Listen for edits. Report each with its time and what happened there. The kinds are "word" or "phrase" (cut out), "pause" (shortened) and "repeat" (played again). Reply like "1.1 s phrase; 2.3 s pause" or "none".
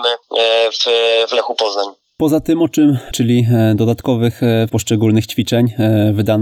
1.3 s word; 3.1 s word; 4.7 s word

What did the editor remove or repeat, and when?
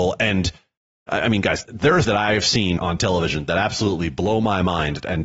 1.6 s word; 2.0 s word; 2.8 s word

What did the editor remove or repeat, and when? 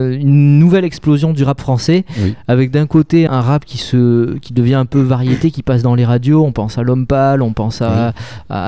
3.3 s word

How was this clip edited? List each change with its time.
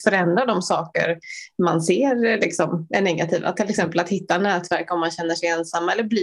none

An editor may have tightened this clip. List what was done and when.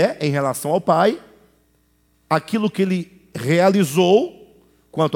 none

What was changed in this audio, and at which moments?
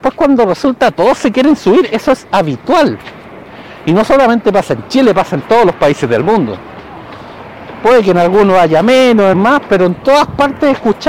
9.3 s word

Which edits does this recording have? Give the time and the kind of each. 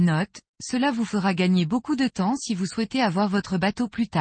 none

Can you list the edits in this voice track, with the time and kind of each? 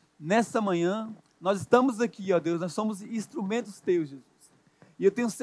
1.2 s pause

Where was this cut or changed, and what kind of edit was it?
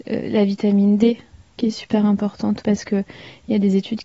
2.6 s word

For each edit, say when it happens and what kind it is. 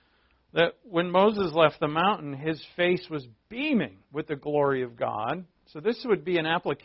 4.0 s pause

